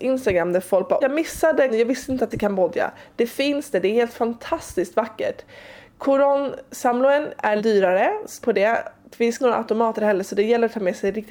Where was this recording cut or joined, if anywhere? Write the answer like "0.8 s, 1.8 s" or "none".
1.0 s, 1.7 s, 2.3 s, 7.6 s, 8.4 s, 9.4 s